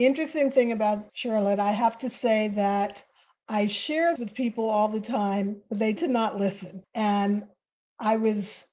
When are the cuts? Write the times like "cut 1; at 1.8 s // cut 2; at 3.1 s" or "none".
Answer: cut 1; at 1.1 s // cut 2; at 4.2 s // cut 3; at 6.0 s

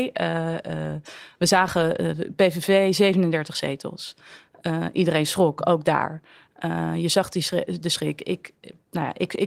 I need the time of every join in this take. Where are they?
none

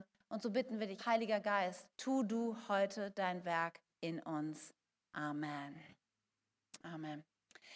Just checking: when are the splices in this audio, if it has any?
cut 1; at 1.0 s // cut 2; at 1.9 s // cut 3; at 3.9 s

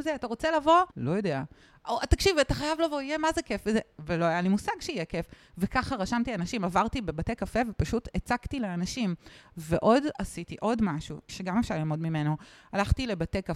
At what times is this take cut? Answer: cut 1; at 0.9 s

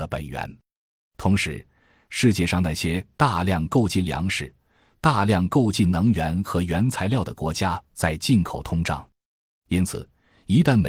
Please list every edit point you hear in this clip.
none

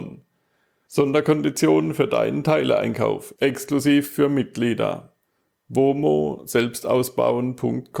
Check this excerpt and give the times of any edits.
none

